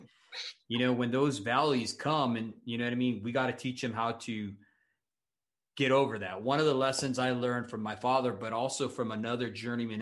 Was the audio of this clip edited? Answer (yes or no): no